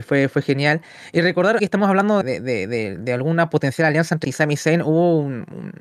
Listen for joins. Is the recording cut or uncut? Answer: cut